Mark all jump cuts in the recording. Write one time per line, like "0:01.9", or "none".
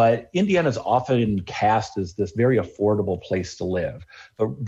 none

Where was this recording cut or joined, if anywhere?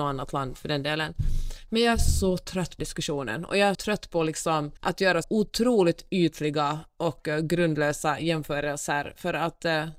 0:02.8
0:03.7
0:04.8
0:05.2

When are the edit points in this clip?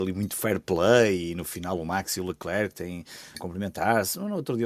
0:03.3

